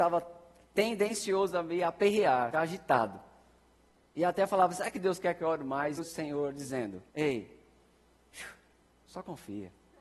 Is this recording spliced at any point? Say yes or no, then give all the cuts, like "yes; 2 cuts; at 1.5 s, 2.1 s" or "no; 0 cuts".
yes; 3 cuts; at 2.5 s, 6.0 s, 7.1 s